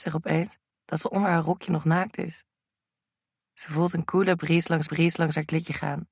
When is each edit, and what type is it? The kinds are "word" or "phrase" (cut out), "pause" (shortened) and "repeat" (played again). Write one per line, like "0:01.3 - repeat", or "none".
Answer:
0:04.9 - repeat

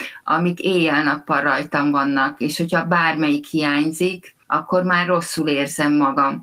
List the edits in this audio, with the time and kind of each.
0:04.4 - pause

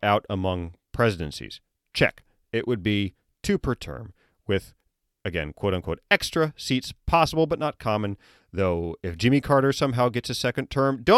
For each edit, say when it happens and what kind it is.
none

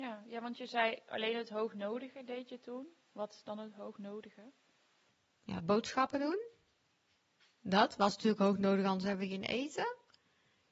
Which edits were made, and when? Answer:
none

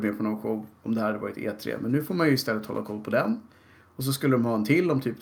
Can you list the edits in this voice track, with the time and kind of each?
none

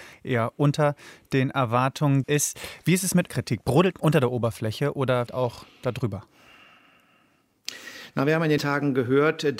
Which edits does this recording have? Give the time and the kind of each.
0:02.2 - word
0:03.3 - word
0:03.9 - word
0:05.3 - word
0:08.6 - word

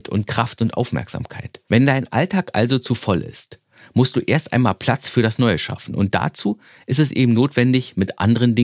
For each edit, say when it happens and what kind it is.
none

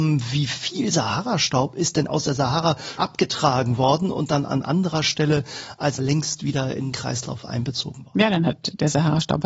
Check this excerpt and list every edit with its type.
0:02.1 - word
0:03.0 - word
0:06.0 - word
0:06.9 - word

